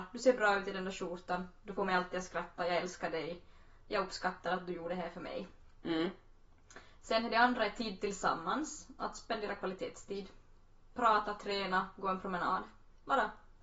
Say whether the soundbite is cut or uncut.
uncut